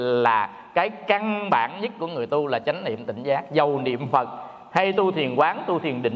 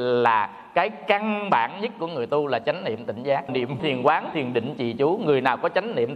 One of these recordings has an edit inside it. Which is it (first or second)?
second